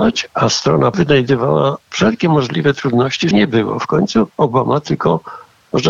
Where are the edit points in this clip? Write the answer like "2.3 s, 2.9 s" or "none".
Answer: 0.9 s, 1.8 s, 3.3 s